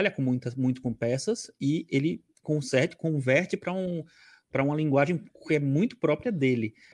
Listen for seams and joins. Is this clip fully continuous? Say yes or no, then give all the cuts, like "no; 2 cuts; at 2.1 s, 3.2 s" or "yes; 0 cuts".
yes; 0 cuts